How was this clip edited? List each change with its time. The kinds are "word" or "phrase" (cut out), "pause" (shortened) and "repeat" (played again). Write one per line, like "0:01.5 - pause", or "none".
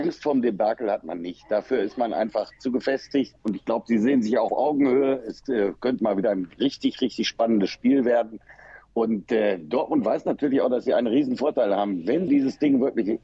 0:03.4 - pause
0:04.5 - word
0:06.0 - word
0:12.3 - word